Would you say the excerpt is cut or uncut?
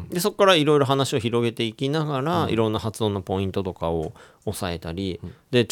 uncut